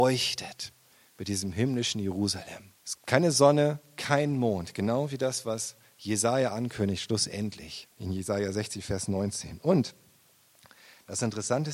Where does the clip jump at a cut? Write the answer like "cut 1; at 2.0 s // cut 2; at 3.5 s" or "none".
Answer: cut 1; at 2.8 s // cut 2; at 7.9 s